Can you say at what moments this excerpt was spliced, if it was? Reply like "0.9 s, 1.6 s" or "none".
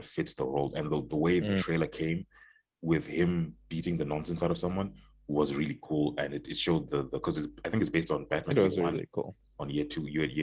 none

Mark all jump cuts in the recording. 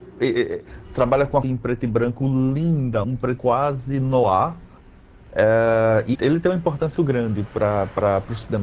1.4 s, 3.0 s, 3.4 s, 6.1 s, 7.0 s

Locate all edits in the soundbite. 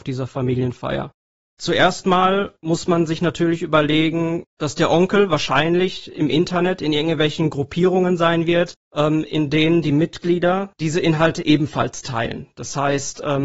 2.6 s, 8.8 s

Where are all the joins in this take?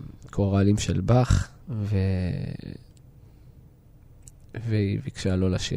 1.6 s

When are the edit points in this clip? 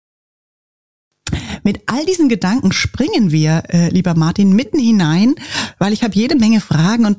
none

